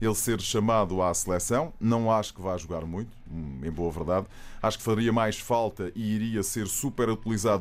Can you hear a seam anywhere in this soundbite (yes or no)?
no